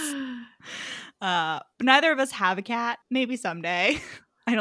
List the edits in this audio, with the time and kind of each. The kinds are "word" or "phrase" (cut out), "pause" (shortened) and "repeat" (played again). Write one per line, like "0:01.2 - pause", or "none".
0:03.0 - pause

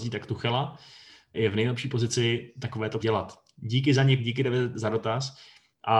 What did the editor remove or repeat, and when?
0:01.3 - word
0:03.0 - word
0:04.2 - word

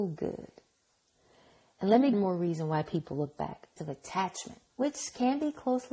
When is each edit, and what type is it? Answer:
0:02.1 - phrase
0:03.8 - word
0:04.7 - pause

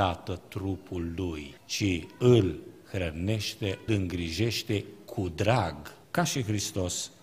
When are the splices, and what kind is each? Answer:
0:01.6 - pause
0:03.9 - word
0:06.0 - pause

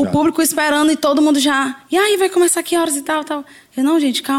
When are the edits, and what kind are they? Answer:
none

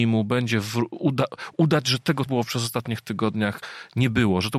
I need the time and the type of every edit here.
0:02.3 - word

